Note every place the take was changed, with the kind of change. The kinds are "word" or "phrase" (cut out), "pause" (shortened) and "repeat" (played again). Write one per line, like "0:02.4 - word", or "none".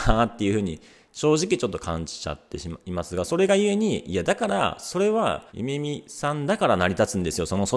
0:05.5 - pause